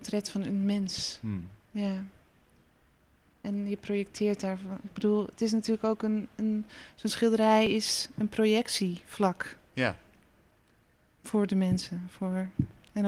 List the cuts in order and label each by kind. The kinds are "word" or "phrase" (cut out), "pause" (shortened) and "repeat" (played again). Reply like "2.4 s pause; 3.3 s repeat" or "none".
none